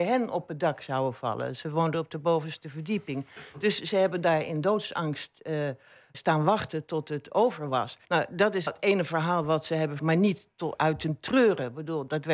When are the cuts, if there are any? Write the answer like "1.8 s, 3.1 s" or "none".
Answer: 6.1 s, 8.0 s, 8.7 s, 10.0 s